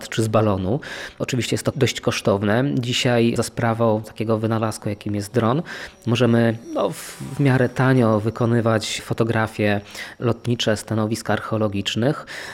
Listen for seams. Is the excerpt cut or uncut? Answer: uncut